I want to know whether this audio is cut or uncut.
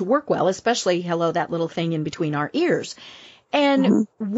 uncut